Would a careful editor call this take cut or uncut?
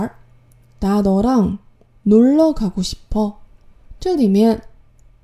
uncut